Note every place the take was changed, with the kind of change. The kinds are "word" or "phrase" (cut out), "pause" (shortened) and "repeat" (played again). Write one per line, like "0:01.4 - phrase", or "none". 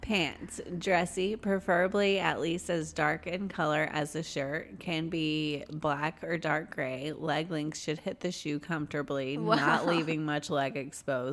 none